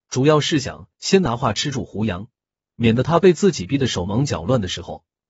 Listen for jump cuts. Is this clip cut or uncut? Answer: uncut